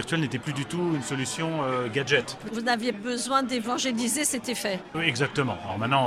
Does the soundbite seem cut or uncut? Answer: cut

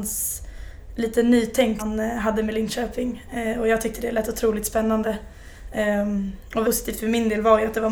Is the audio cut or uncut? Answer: cut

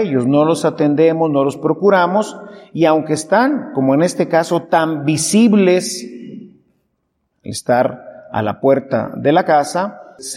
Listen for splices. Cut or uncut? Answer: uncut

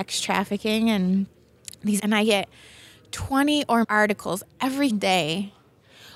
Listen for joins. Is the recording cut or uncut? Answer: cut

